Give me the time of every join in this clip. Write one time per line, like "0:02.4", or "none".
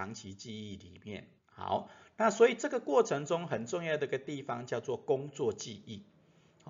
0:01.4